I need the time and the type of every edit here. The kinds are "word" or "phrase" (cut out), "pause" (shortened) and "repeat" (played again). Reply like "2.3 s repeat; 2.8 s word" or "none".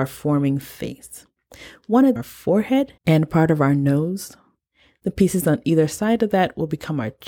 2.2 s phrase; 3.0 s pause